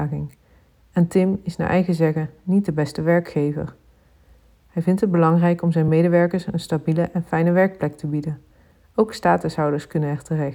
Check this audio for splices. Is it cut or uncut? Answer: uncut